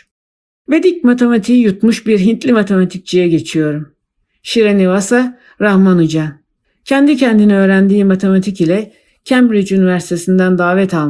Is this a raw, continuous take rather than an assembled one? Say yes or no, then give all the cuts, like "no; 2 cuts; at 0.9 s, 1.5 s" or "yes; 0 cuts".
yes; 0 cuts